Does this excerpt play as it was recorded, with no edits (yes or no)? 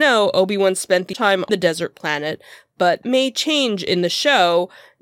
no